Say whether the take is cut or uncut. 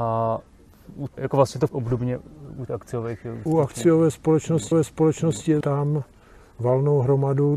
cut